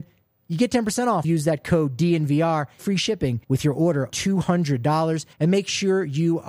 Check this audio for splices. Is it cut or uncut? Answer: cut